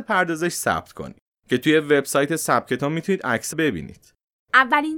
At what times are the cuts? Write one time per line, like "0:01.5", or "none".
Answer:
0:03.5